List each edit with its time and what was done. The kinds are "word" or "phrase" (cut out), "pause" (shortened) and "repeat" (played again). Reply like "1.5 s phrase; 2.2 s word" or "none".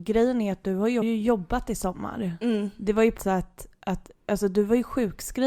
1.0 s phrase; 3.2 s word